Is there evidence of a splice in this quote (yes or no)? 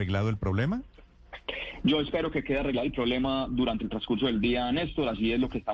no